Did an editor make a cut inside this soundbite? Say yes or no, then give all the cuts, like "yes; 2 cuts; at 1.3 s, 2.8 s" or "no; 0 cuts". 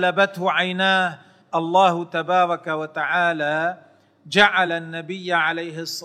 no; 0 cuts